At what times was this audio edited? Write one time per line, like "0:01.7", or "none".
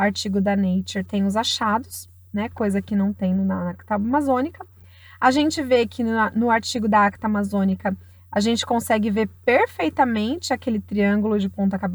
none